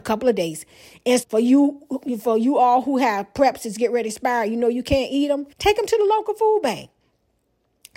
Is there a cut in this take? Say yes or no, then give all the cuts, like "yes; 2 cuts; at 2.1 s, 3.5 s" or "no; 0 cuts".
yes; 2 cuts; at 1.2 s, 5.5 s